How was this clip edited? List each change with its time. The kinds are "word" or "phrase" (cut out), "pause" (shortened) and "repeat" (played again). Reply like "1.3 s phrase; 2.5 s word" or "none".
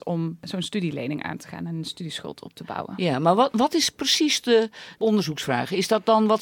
none